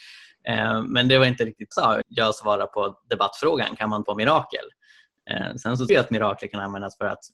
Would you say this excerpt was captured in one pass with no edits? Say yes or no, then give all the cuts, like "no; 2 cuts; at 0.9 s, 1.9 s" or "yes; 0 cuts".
no; 4 cuts; at 1.7 s, 2.0 s, 4.0 s, 5.9 s